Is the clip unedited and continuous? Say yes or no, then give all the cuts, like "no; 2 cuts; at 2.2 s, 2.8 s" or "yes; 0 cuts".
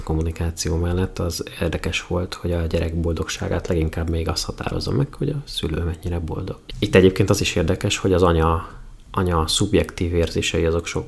yes; 0 cuts